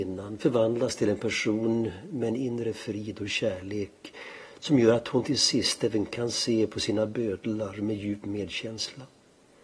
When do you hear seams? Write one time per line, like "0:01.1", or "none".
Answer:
none